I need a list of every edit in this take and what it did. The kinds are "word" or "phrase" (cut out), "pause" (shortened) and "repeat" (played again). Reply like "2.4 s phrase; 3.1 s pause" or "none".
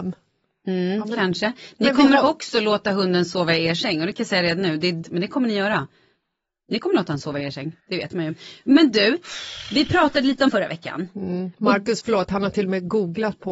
5.0 s word; 7.8 s pause; 10.5 s word